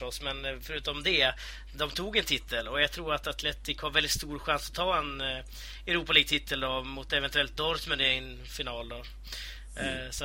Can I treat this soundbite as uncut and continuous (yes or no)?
yes